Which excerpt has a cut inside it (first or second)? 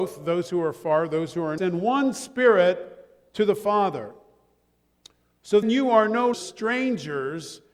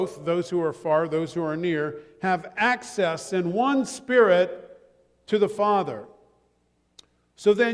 first